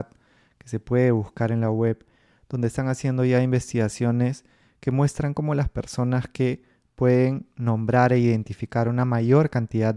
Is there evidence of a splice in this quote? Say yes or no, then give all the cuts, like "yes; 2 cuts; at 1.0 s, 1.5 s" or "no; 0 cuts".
no; 0 cuts